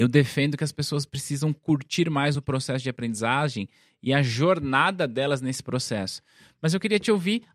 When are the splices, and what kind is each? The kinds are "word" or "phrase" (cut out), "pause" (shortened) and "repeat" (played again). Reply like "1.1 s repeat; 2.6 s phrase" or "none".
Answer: none